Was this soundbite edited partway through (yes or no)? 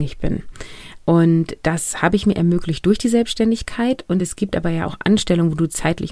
no